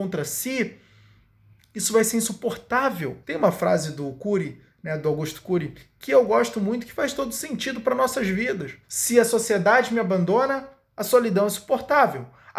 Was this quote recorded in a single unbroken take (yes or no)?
no